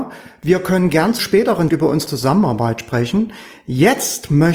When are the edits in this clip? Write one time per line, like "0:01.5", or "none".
0:01.2
0:01.7
0:02.1